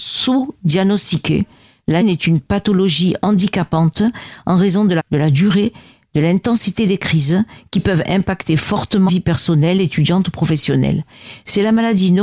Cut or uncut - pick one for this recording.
cut